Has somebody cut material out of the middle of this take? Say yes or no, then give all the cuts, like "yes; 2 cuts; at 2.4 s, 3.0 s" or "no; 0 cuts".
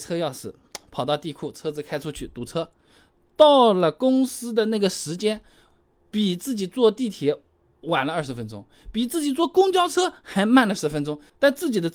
no; 0 cuts